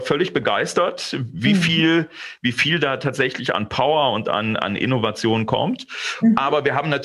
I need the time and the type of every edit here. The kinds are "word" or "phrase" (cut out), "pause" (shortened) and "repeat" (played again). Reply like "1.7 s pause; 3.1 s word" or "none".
none